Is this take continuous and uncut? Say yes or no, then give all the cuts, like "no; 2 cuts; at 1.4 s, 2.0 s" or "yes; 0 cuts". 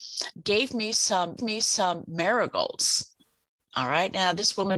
no; 1 cut; at 1.4 s